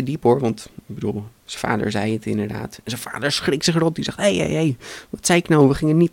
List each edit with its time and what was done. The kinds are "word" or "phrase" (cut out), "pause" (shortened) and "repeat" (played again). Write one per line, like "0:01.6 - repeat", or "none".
none